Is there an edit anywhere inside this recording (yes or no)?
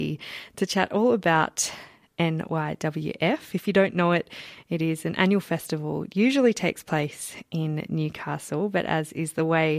no